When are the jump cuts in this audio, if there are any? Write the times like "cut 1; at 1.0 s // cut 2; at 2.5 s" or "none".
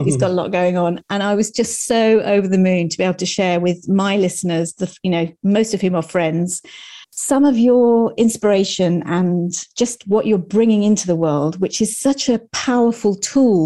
cut 1; at 7.0 s